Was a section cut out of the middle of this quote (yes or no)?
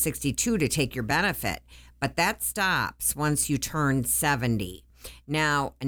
no